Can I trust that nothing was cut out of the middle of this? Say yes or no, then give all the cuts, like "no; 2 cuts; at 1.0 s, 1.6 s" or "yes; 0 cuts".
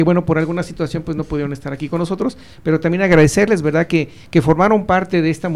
yes; 0 cuts